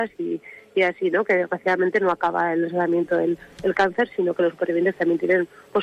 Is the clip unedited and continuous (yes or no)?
no